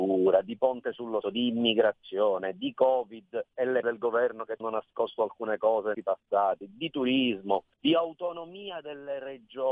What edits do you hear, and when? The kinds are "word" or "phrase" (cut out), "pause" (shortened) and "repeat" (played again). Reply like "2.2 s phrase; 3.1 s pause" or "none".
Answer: 1.2 s word; 3.5 s pause; 3.8 s word; 4.6 s word; 5.9 s phrase; 7.7 s pause